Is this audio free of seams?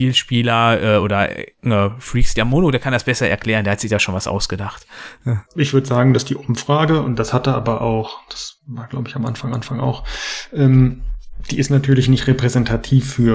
no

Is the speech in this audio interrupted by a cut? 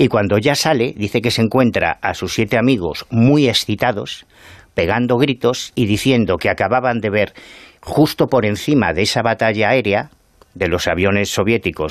no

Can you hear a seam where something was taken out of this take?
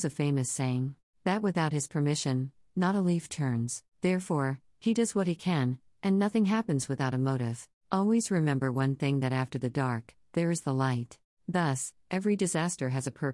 yes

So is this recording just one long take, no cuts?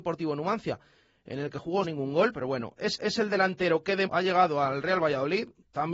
no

